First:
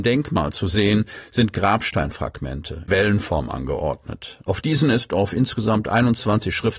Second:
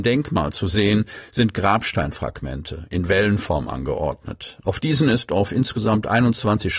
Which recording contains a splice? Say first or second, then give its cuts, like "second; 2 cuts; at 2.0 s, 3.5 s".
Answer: first; 1 cut; at 2.9 s